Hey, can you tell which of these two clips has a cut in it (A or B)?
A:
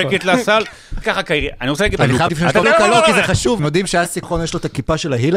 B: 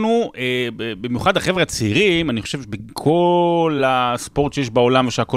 A